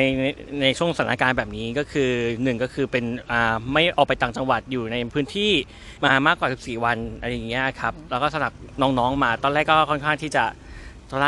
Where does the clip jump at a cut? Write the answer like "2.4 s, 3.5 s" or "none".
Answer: 6.0 s